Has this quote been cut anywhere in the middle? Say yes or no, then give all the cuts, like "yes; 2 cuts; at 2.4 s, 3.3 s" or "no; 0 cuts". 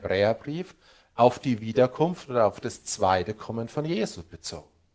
no; 0 cuts